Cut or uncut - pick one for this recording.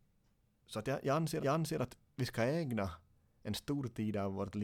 cut